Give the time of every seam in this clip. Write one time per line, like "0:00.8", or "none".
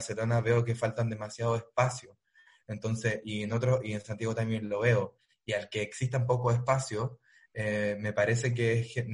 none